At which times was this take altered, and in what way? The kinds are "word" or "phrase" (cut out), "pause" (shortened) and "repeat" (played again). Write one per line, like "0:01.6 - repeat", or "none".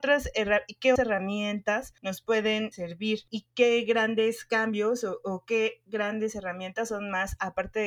0:01.0 - word
0:02.0 - pause
0:03.3 - word